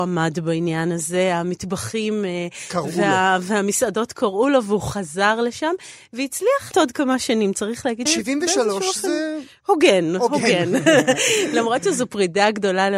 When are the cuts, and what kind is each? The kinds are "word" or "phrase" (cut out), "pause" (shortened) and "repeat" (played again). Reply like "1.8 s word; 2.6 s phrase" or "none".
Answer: 6.7 s word; 8.1 s word